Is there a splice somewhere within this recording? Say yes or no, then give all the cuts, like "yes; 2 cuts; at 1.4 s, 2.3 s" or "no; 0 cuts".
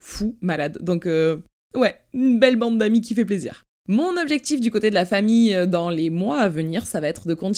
no; 0 cuts